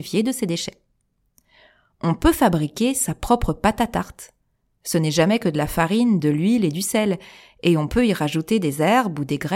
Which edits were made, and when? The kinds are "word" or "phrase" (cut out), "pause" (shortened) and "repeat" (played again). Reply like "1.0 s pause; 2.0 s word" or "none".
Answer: none